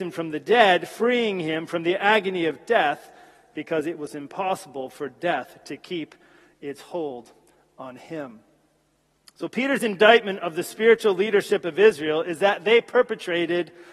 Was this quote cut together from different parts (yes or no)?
no